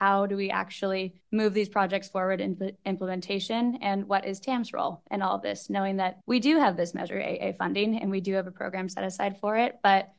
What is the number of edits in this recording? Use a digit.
2